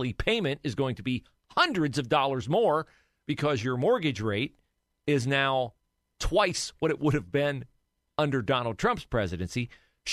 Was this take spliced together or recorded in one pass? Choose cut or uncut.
uncut